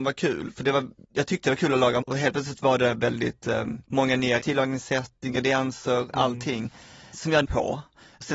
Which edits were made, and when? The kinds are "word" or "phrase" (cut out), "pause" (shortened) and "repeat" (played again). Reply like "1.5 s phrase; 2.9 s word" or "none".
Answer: 1.0 s pause; 2.0 s word; 3.8 s pause; 4.4 s phrase; 7.1 s word; 7.4 s phrase